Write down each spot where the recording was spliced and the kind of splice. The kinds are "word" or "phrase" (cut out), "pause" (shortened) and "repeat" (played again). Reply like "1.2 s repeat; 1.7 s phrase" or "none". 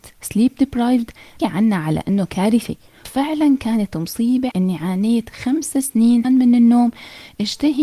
1.4 s word; 3.0 s word; 4.5 s word; 6.2 s word